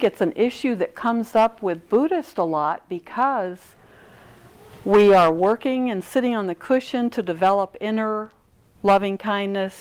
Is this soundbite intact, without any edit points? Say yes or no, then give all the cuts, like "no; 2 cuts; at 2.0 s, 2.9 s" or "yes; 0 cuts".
yes; 0 cuts